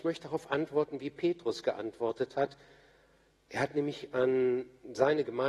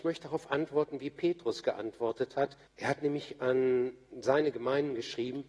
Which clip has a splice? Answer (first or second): second